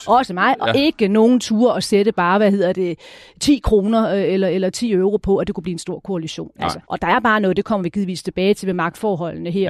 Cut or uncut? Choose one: cut